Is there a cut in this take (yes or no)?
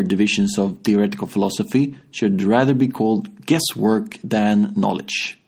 no